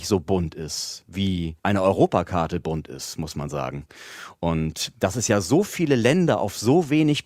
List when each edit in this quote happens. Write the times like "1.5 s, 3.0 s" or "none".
1.6 s